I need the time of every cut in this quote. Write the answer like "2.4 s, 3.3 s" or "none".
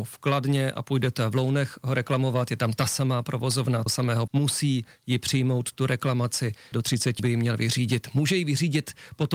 3.9 s, 4.3 s, 6.7 s, 7.2 s